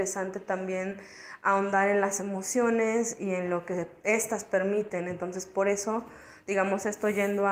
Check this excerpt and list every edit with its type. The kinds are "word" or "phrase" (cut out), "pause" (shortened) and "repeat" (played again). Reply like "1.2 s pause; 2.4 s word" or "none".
none